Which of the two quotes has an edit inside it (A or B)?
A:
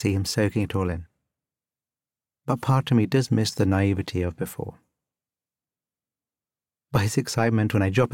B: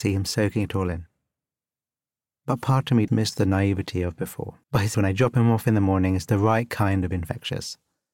B